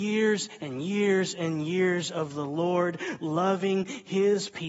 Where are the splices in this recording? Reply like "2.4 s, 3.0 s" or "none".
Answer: none